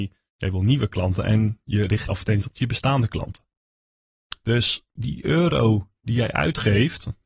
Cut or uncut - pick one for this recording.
cut